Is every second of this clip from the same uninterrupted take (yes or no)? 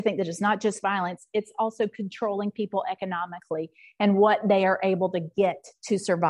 yes